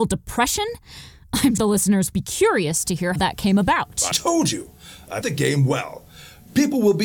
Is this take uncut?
no; 5 cuts; at 1.6 s, 2.1 s, 3.2 s, 4.1 s, 5.2 s

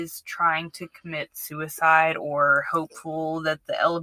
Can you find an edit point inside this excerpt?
no; 0 cuts

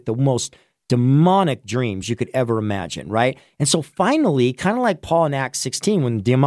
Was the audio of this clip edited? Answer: no; 0 cuts

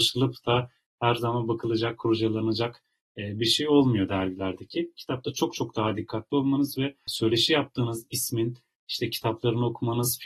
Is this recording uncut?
yes; 0 cuts

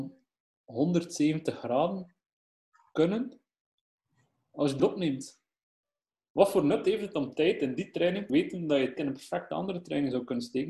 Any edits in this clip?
yes; 3 cuts; at 4.8 s, 8.3 s, 9.0 s

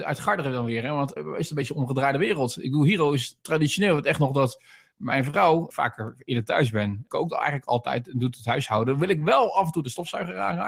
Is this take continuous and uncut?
no; 3 cuts; at 1.2 s, 5.7 s, 7.1 s

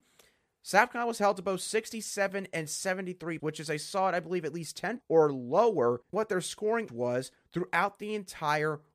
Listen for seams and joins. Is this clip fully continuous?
no; 4 cuts; at 3.4 s, 5.0 s, 6.1 s, 6.9 s

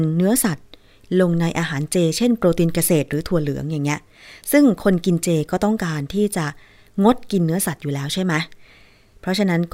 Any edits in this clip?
no; 0 cuts

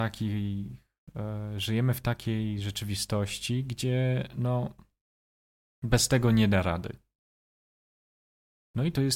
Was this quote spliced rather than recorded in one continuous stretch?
no; 0 cuts

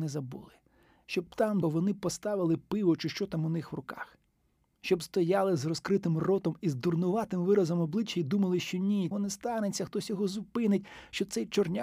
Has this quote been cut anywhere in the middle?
yes; 2 cuts; at 1.6 s, 9.1 s

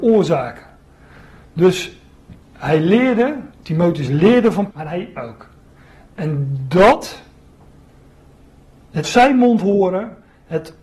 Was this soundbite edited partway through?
yes; 5 cuts; at 2.4 s, 3.5 s, 4.7 s, 5.2 s, 9.0 s

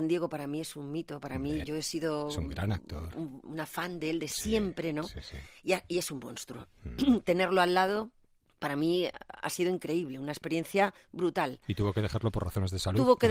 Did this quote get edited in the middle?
yes; 3 cuts; at 1.6 s, 3.4 s, 8.2 s

